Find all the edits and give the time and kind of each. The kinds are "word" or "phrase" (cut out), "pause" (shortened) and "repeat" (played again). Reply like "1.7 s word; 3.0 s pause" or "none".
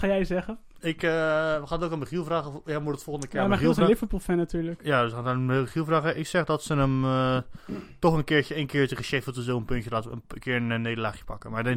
none